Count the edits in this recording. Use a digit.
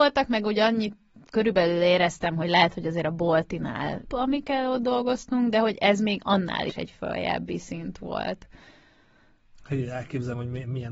1